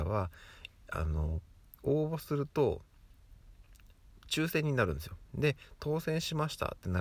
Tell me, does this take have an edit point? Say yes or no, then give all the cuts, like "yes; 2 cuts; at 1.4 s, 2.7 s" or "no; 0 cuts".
no; 0 cuts